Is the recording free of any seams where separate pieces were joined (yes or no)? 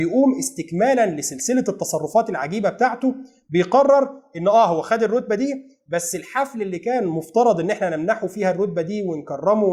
yes